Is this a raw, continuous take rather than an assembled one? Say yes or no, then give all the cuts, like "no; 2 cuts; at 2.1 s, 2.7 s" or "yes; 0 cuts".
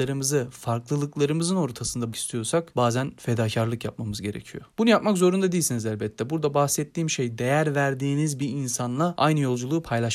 no; 1 cut; at 2.1 s